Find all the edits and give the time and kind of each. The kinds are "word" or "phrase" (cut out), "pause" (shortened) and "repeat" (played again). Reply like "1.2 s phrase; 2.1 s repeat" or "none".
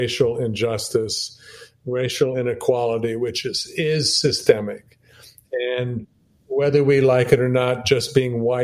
none